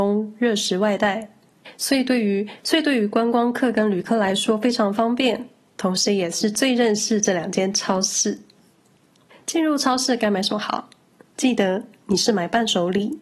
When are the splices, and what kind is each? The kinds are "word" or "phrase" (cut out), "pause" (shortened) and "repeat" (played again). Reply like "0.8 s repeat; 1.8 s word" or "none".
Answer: none